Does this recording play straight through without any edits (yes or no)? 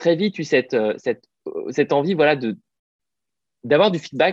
yes